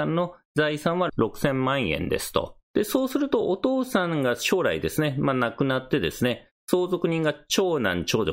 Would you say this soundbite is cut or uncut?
cut